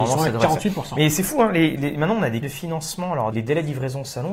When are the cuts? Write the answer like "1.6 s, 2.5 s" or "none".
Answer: 2.4 s, 3.3 s